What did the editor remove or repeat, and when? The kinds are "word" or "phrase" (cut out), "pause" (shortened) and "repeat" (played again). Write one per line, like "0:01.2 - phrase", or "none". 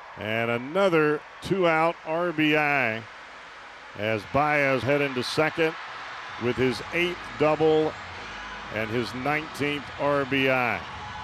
0:04.8 - word